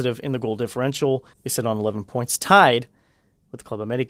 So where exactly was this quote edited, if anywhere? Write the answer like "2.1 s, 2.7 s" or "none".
1.3 s

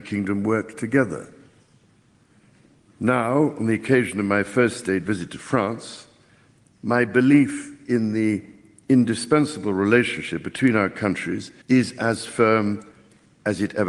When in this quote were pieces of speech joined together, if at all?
11.6 s

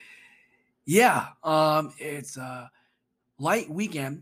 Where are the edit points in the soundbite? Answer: none

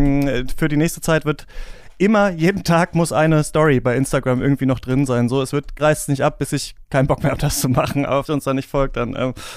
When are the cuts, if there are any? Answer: 5.8 s, 8.3 s

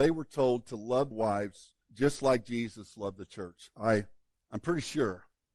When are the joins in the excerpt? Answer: 1.1 s, 1.8 s, 4.3 s

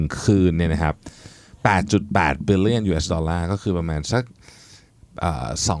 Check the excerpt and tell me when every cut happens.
none

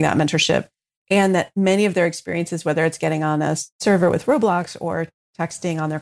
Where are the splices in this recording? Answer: 3.7 s

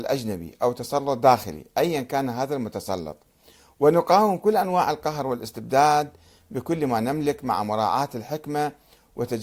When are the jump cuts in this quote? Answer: none

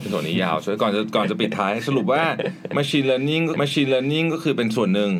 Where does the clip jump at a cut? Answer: 3.5 s

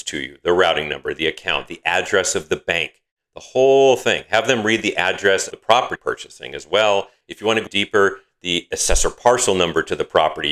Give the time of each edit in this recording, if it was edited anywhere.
5.5 s, 6.0 s, 7.2 s, 7.7 s

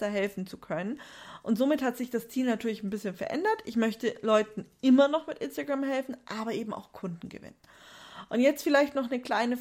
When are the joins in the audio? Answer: none

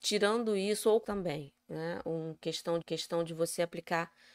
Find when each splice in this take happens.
1.0 s, 2.8 s

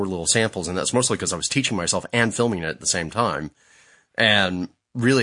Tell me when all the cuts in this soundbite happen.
none

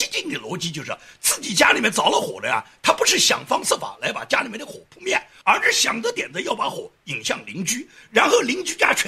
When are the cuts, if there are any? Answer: none

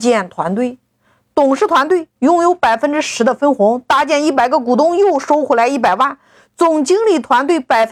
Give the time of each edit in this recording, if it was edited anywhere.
2.2 s

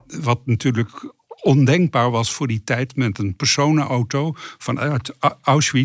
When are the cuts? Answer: none

